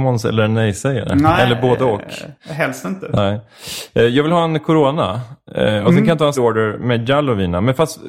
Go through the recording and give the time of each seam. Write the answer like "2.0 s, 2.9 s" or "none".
6.3 s